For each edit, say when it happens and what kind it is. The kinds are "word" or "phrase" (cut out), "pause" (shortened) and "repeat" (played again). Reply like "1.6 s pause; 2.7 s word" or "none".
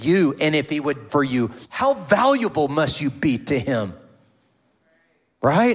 1.1 s phrase; 1.6 s pause